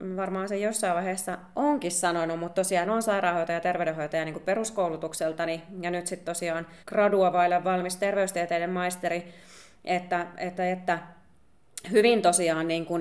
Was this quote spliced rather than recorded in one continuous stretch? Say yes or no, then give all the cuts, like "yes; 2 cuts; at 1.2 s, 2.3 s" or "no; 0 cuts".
yes; 2 cuts; at 2.8 s, 6.8 s